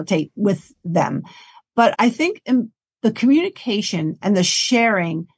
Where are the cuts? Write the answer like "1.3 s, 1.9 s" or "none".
1.9 s